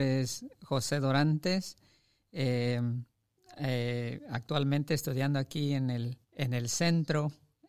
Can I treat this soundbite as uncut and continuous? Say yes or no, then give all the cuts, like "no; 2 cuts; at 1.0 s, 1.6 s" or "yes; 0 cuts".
no; 1 cut; at 6.2 s